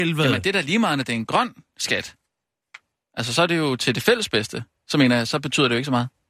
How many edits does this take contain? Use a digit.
0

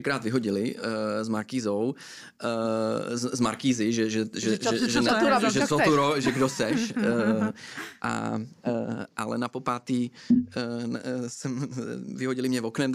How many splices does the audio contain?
0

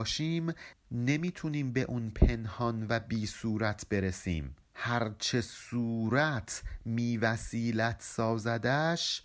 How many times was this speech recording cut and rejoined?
1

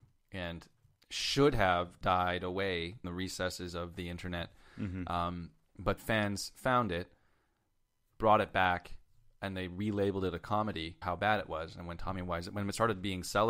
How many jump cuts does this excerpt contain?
4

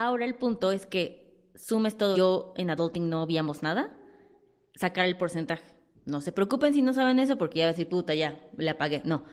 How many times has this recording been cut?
2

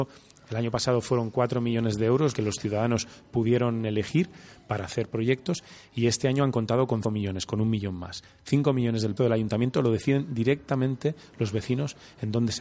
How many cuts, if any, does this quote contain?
3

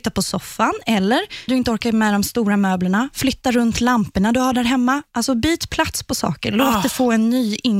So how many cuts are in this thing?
1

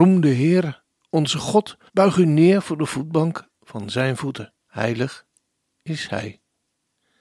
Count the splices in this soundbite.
2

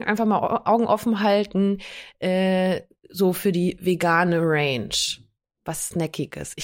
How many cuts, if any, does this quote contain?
0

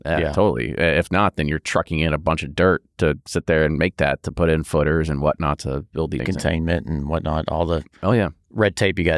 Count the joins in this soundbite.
1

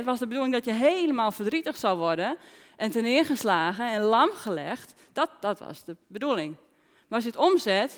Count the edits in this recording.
0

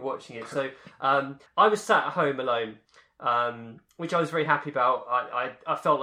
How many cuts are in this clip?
0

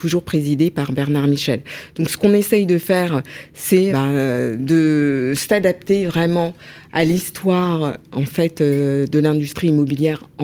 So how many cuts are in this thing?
1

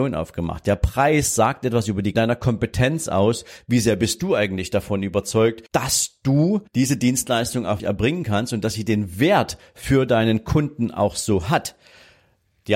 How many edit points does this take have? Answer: 4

